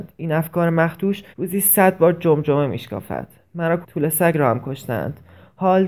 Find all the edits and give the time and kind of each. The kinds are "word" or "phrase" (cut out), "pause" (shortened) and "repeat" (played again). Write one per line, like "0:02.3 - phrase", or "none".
0:01.3 - pause
0:03.8 - word